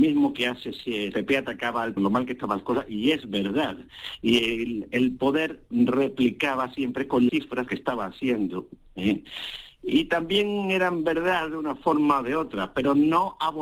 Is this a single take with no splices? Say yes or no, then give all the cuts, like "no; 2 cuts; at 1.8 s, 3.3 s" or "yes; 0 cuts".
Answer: no; 4 cuts; at 1.1 s, 2.0 s, 7.3 s, 7.7 s